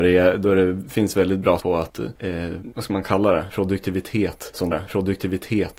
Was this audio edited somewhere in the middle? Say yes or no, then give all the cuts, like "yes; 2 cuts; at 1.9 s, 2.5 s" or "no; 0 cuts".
yes; 2 cuts; at 1.6 s, 4.7 s